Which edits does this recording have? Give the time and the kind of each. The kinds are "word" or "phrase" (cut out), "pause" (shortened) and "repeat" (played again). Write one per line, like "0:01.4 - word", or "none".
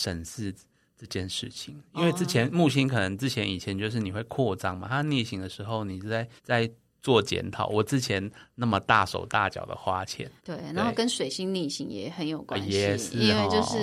0:06.4 - pause
0:10.4 - pause